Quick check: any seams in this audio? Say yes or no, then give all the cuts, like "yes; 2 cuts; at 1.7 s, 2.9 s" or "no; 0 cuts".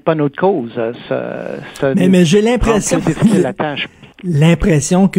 yes; 1 cut; at 4.1 s